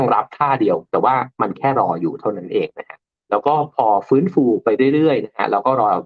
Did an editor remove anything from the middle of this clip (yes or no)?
yes